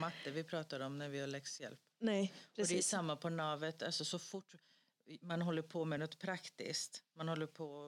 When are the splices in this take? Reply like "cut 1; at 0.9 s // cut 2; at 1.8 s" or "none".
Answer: none